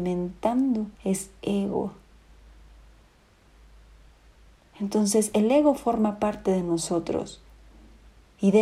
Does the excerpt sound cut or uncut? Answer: cut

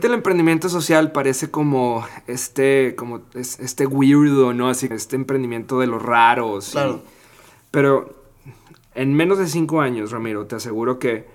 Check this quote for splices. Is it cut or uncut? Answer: cut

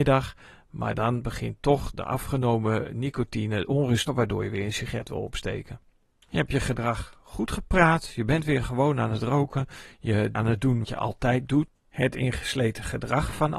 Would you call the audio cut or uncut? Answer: cut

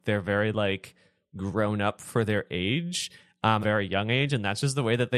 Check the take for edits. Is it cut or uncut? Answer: cut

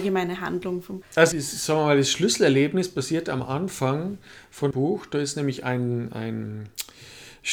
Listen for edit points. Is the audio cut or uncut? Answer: cut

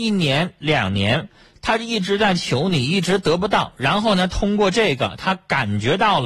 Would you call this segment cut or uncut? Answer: uncut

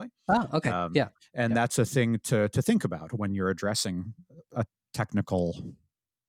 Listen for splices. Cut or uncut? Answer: uncut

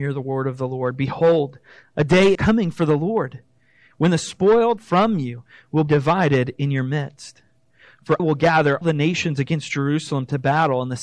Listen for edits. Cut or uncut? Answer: cut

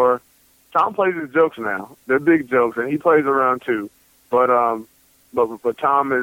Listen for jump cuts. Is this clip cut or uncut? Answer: uncut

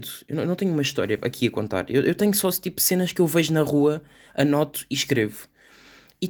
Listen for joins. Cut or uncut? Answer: uncut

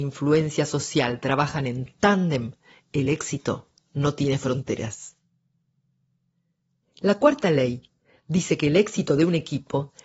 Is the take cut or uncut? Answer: uncut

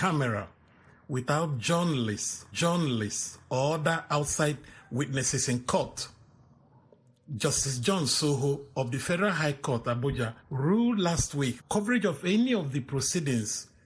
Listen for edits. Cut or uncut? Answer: cut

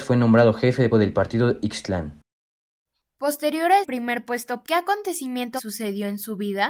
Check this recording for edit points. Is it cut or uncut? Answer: cut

